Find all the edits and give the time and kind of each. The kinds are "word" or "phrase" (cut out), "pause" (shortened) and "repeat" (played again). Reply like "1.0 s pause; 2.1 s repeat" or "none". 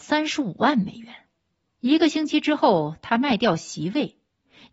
1.6 s pause